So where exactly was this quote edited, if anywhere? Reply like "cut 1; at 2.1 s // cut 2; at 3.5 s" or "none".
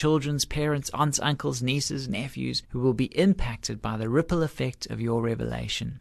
cut 1; at 2.6 s

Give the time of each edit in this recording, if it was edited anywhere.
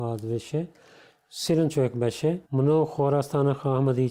cut 1; at 2.5 s

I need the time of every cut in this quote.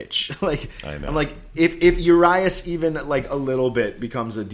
none

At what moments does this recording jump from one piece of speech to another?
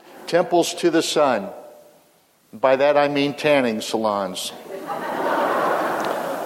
none

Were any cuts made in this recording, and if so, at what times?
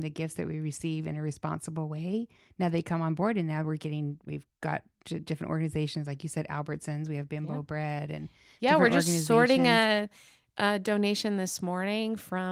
none

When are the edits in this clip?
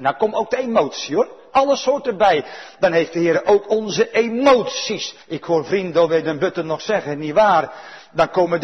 cut 1; at 5.2 s

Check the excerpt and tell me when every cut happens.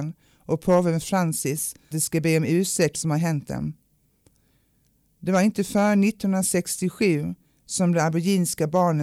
cut 1; at 1.9 s // cut 2; at 2.9 s

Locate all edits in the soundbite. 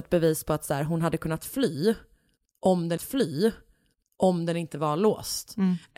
cut 1; at 3.0 s

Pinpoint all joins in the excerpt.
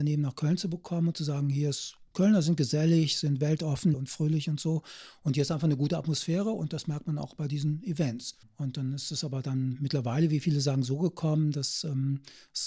cut 1; at 2.1 s // cut 2; at 3.9 s // cut 3; at 8.4 s

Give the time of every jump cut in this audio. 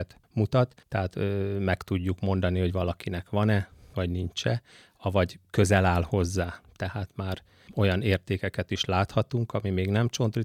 none

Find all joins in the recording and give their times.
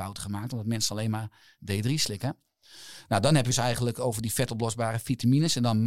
cut 1; at 3.5 s

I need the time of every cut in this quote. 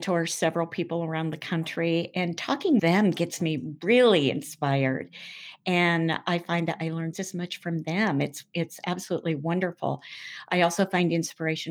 cut 1; at 2.8 s // cut 2; at 7.1 s

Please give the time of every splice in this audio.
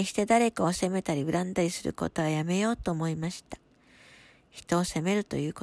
none

